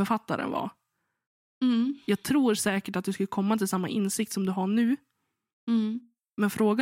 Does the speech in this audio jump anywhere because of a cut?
no; 0 cuts

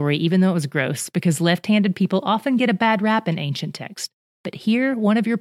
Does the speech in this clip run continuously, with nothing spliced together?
yes; 0 cuts

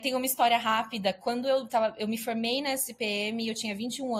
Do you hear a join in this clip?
no; 0 cuts

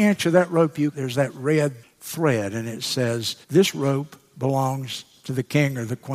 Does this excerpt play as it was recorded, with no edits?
no; 3 cuts; at 0.9 s, 1.8 s, 3.4 s

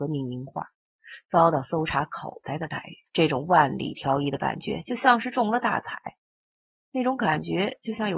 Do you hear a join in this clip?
yes; 1 cut; at 3.1 s

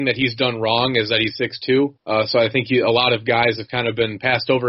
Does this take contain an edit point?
yes; 2 cuts; at 1.3 s, 2.0 s

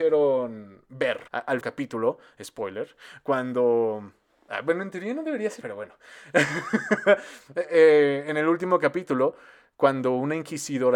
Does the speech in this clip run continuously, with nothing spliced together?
no; 3 cuts; at 1.3 s, 1.6 s, 5.6 s

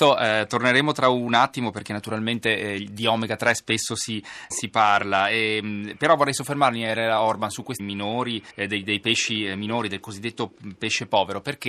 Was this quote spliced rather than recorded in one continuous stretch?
yes; 3 cuts; at 4.5 s, 7.8 s, 8.5 s

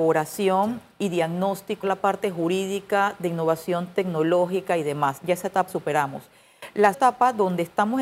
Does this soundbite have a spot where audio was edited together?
yes; 3 cuts; at 1.8 s, 5.7 s, 6.9 s

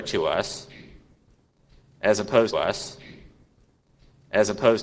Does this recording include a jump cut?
yes; 1 cut; at 2.5 s

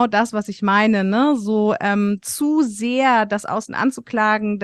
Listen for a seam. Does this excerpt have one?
no; 0 cuts

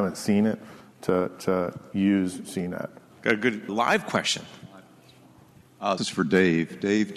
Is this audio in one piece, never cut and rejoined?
no; 3 cuts; at 3.1 s, 3.7 s, 6.0 s

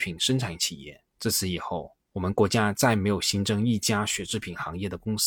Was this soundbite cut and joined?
yes; 2 cuts; at 1.1 s, 2.0 s

